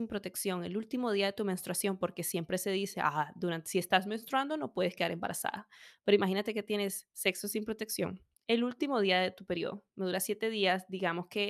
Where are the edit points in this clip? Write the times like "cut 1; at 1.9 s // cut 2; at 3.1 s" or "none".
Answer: none